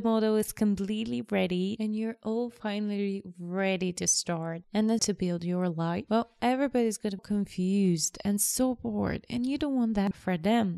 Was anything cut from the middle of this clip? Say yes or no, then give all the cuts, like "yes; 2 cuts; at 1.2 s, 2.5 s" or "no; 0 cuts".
yes; 2 cuts; at 5.0 s, 7.2 s